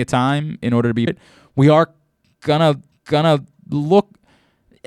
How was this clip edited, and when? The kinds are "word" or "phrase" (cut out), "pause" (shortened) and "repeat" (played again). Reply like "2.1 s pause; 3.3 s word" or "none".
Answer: 1.1 s phrase; 2.9 s repeat